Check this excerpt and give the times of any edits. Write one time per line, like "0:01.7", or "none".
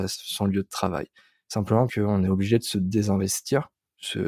0:01.9